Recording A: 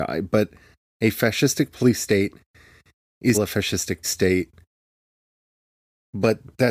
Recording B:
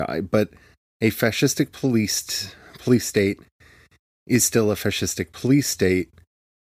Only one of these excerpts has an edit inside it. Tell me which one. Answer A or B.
A